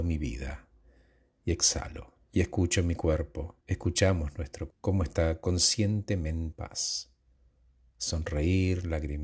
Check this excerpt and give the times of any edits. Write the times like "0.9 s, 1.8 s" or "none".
2.2 s, 3.6 s, 4.7 s, 6.5 s